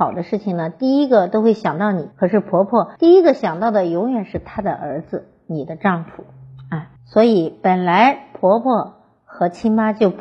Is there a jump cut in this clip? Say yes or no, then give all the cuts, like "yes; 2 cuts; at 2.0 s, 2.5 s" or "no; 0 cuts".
yes; 3 cuts; at 2.1 s, 3.0 s, 7.0 s